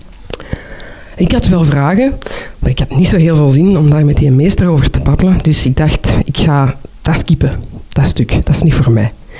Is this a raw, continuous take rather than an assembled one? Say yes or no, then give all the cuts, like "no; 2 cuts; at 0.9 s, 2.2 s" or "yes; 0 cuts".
yes; 0 cuts